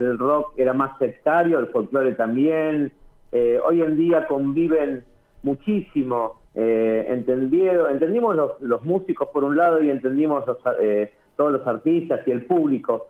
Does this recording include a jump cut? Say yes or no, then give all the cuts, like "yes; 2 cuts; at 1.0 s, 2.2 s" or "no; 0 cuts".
yes; 1 cut; at 6.4 s